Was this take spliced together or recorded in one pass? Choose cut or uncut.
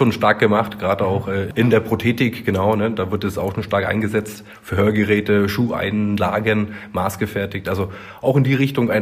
uncut